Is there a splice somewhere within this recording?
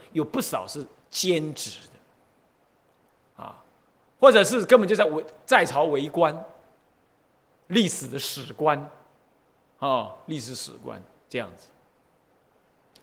no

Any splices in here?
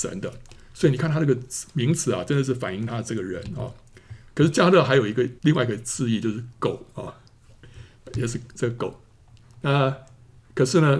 yes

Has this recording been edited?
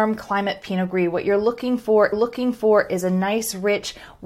yes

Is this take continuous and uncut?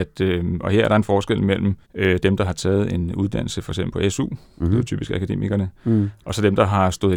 no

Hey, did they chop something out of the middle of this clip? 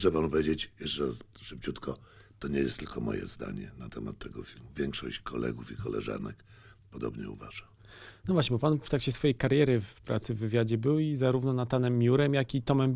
no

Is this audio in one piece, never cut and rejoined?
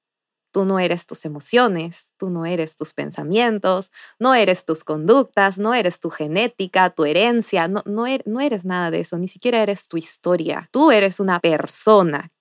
yes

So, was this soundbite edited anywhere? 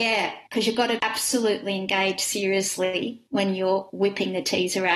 yes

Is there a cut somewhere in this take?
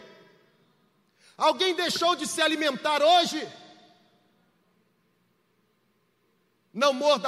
no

